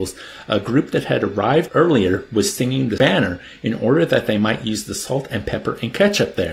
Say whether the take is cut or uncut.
cut